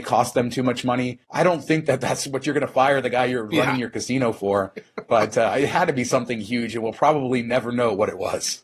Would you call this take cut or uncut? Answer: uncut